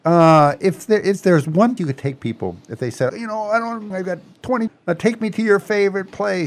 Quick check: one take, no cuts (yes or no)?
no